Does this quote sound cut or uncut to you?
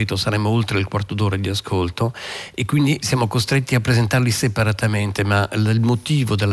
uncut